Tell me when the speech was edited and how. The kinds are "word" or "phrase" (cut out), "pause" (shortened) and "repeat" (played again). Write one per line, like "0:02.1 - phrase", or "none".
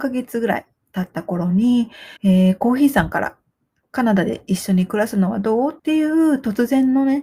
0:02.2 - pause
0:05.8 - pause